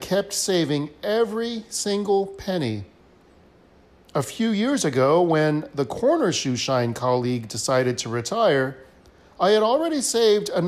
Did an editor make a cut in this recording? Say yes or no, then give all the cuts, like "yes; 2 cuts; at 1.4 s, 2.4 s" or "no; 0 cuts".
no; 0 cuts